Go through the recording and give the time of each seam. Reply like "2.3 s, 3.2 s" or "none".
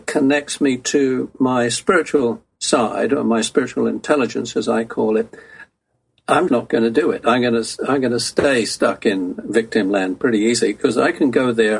6.5 s